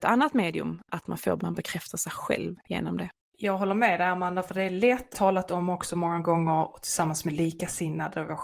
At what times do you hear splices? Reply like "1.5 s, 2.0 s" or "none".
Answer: 1.4 s, 5.1 s